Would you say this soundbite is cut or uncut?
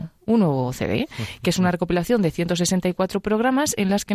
uncut